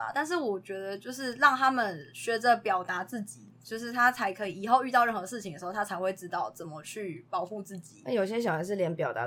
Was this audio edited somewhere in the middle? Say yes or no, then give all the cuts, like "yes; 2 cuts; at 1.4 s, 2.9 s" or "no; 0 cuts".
yes; 1 cut; at 3.5 s